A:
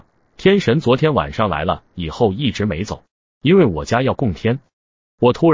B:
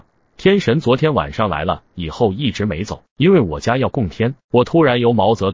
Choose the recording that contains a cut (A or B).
B